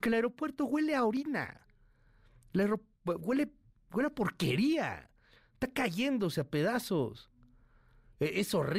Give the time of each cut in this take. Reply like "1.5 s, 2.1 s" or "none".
none